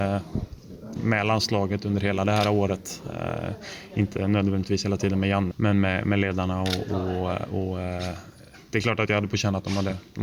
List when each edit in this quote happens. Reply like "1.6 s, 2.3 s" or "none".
1.0 s, 5.5 s